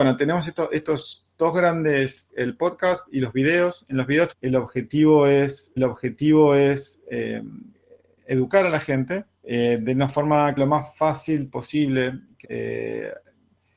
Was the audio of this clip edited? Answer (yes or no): yes